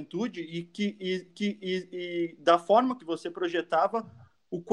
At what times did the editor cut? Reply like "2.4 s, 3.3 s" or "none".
1.3 s, 3.0 s